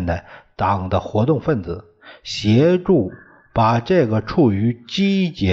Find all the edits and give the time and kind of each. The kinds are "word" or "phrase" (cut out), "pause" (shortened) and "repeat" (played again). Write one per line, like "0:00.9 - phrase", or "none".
none